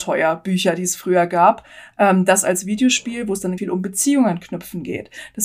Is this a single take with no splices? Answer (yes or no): no